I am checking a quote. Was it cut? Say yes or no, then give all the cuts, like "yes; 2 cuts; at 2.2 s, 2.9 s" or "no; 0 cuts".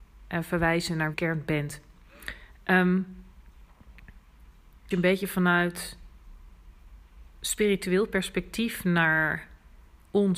yes; 2 cuts; at 1.1 s, 4.9 s